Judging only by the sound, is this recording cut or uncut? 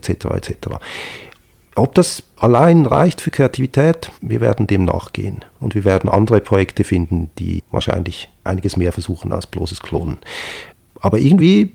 cut